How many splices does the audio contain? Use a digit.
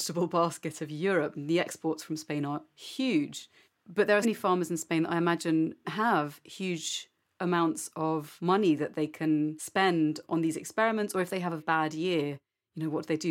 4